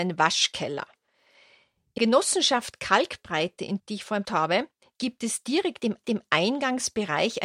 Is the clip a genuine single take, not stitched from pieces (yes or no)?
no